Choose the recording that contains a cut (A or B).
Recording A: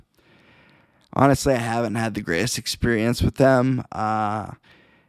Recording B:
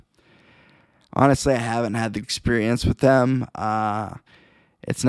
B